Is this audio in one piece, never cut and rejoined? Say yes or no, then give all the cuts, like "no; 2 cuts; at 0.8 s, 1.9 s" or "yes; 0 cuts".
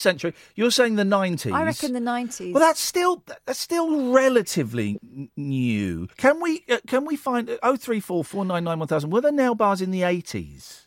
no; 2 cuts; at 6.1 s, 8.3 s